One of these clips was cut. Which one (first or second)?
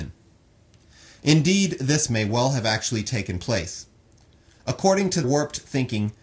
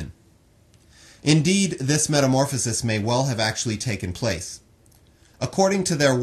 first